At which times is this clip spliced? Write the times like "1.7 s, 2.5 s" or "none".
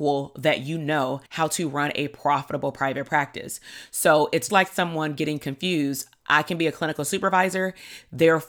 1.3 s, 4.5 s